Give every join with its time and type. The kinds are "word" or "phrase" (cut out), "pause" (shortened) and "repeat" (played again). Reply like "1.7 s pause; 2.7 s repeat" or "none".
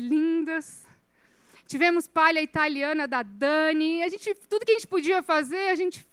none